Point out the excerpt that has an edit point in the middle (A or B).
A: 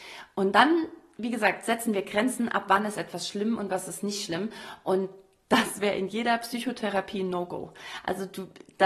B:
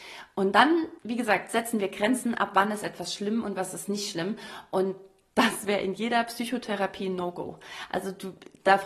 B